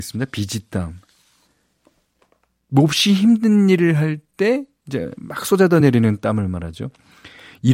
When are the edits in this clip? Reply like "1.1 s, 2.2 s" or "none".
none